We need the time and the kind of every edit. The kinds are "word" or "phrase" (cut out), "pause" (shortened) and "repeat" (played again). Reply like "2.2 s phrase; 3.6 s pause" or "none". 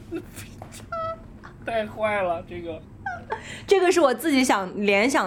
none

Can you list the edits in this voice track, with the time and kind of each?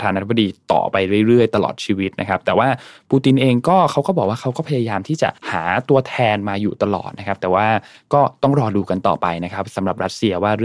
5.4 s pause

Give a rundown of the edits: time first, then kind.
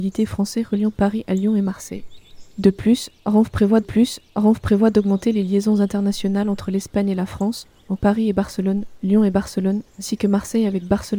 3.8 s repeat; 8.0 s word; 9.9 s pause

